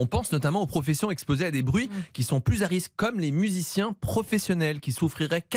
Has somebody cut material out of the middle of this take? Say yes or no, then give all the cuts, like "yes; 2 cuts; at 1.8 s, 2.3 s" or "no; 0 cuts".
no; 0 cuts